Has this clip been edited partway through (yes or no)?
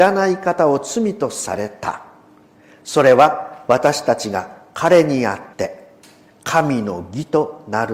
yes